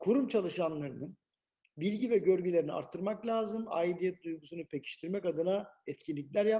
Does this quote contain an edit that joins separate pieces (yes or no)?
no